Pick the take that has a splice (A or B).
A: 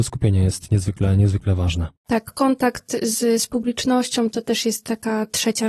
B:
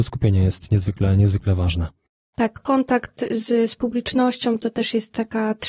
A